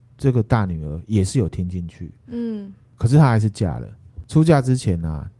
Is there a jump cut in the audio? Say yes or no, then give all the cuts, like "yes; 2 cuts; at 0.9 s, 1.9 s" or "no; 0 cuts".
no; 0 cuts